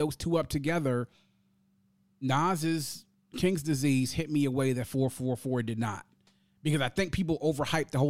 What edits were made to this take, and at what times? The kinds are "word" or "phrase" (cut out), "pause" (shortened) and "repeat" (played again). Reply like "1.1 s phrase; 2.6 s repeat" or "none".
none

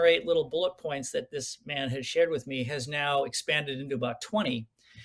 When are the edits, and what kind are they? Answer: none

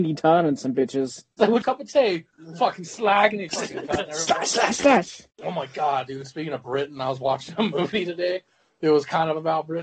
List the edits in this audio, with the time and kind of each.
1.3 s pause; 1.6 s phrase; 3.5 s word; 5.3 s pause

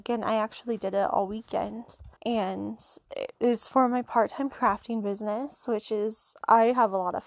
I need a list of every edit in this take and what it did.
2.2 s pause

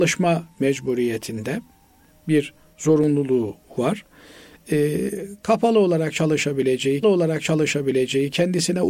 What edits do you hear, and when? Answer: 7.0 s repeat

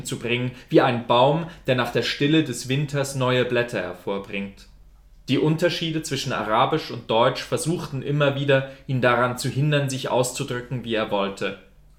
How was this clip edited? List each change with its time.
none

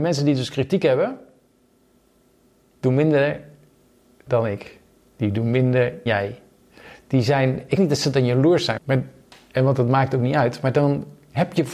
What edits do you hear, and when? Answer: 6.1 s word; 7.8 s word; 8.8 s word

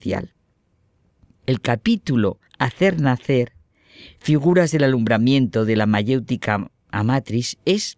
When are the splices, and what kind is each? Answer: 2.5 s pause

